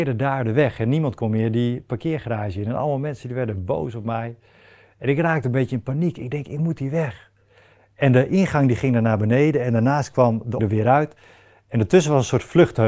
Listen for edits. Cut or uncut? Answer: cut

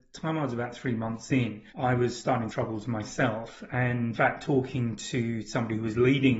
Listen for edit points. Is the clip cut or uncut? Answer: cut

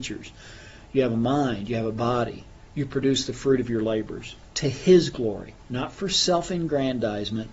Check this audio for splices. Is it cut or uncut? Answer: cut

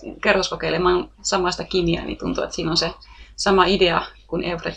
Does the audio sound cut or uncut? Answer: cut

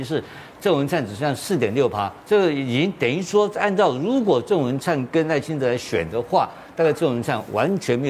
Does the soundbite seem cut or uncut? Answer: cut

